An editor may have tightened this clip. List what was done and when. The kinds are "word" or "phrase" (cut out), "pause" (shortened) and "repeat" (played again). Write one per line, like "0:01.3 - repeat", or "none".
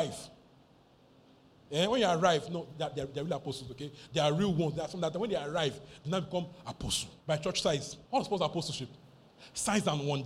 0:07.2 - pause
0:08.1 - pause